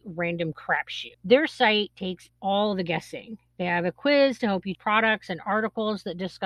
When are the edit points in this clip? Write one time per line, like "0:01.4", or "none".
0:01.1
0:02.3
0:04.7